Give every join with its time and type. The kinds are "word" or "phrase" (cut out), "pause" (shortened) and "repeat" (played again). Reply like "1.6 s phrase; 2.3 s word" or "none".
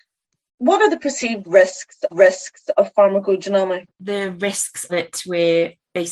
2.1 s repeat; 3.9 s pause; 4.9 s word

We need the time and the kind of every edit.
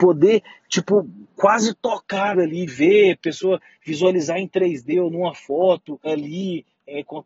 2.3 s word; 2.7 s word; 6.1 s word

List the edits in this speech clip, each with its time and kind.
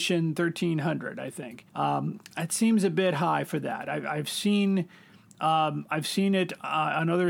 1.7 s pause

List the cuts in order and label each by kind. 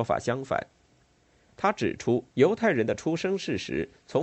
2.3 s pause

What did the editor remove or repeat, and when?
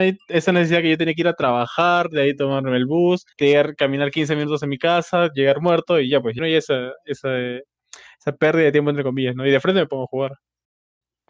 3.3 s pause; 6.4 s phrase

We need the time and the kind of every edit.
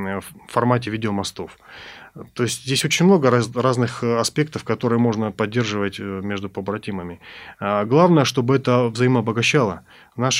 none

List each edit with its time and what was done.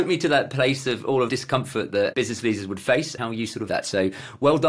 1.3 s phrase; 2.1 s word; 3.2 s word; 3.7 s word

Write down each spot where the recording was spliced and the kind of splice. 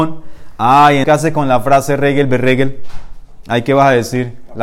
1.0 s word

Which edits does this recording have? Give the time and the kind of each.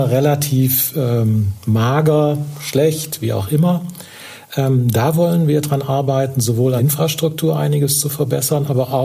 6.8 s word

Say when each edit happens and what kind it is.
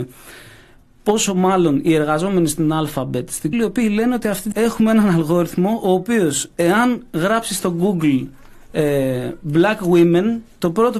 3.5 s word; 4.5 s word

